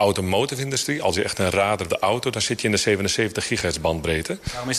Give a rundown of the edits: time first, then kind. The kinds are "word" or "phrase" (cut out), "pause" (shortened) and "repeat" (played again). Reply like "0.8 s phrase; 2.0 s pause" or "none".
1.9 s phrase